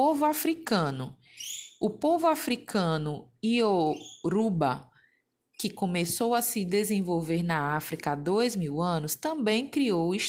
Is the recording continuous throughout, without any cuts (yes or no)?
yes